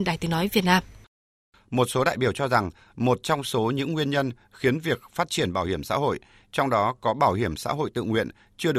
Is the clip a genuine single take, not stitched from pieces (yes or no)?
yes